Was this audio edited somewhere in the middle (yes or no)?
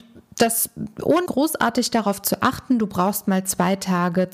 yes